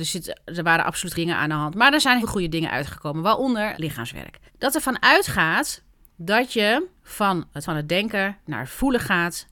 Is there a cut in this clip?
yes; 6 cuts; at 1.1 s, 2.2 s, 3.7 s, 4.5 s, 7.0 s, 7.6 s

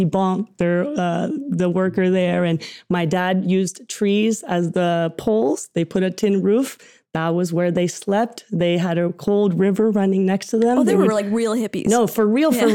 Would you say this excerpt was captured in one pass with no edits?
yes; 0 cuts

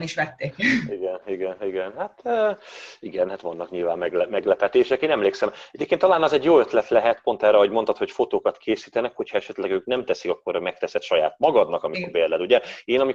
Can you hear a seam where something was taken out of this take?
yes; 1 cut; at 1.2 s

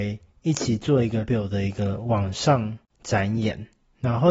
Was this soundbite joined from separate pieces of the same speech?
yes; 1 cut; at 1.3 s

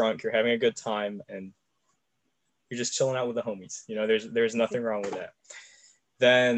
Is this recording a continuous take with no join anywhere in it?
yes; 0 cuts

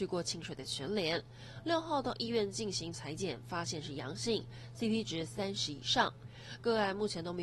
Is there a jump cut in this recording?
yes; 1 cut; at 2.9 s

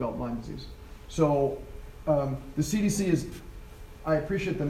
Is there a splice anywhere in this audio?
no; 0 cuts

